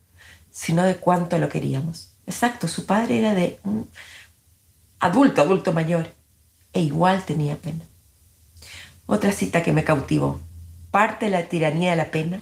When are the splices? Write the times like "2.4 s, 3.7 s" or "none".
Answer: 2.2 s